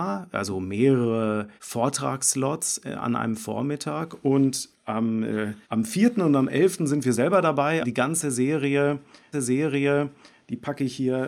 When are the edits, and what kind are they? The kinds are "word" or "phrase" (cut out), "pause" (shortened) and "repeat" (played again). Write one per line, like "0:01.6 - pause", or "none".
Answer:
0:01.6 - pause
0:04.7 - word
0:05.6 - pause
0:07.8 - word
0:09.3 - repeat

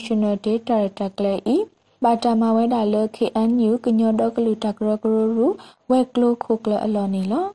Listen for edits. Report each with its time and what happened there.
none

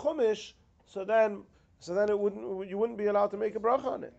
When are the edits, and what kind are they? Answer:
none

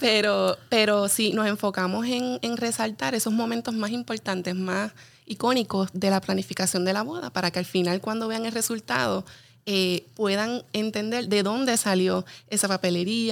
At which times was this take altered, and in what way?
none

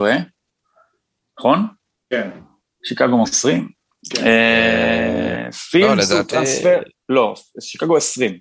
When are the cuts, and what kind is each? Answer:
0:03.2 - word

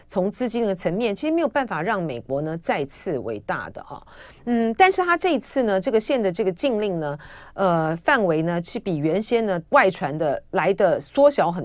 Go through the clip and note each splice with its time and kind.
0:09.7 - pause

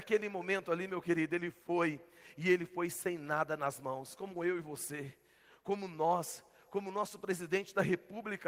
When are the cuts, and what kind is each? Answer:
none

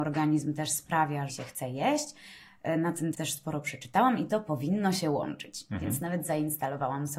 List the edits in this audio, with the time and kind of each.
0:01.3 - phrase
0:03.1 - word

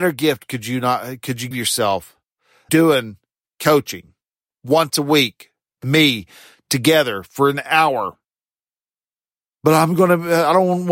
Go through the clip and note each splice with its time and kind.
0:01.5 - word
0:02.7 - word
0:05.8 - word

